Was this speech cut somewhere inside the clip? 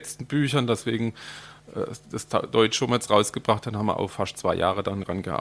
no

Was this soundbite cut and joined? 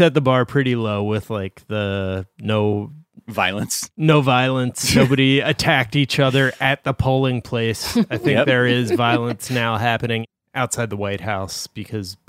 no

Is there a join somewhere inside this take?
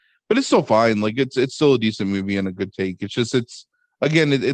no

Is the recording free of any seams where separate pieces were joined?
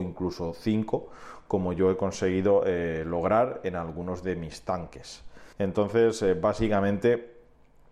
no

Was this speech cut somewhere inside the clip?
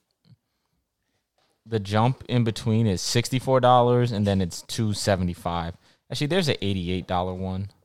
no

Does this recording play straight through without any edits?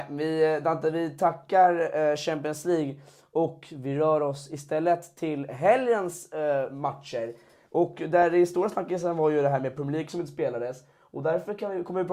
yes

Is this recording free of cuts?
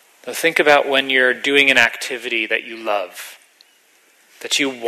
yes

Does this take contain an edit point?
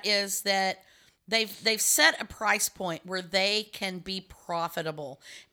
no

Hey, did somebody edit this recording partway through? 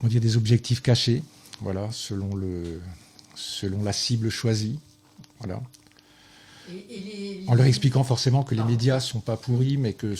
yes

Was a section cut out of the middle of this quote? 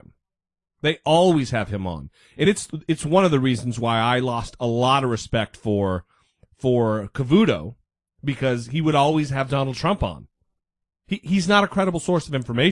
no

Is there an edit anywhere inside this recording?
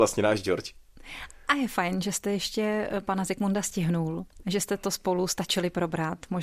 no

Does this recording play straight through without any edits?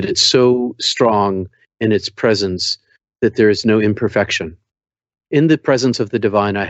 yes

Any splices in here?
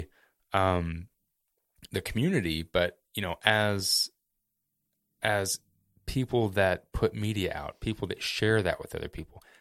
no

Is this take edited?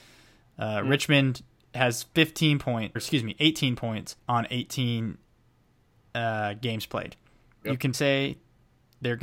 yes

